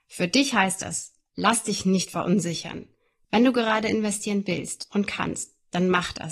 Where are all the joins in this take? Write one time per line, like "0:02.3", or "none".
none